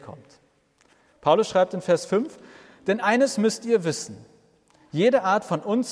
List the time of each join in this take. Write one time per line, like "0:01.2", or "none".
none